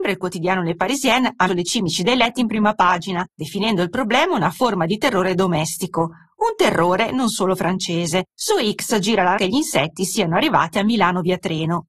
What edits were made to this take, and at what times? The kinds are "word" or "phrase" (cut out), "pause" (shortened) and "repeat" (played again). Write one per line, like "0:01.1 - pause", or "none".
0:01.5 - word
0:09.4 - word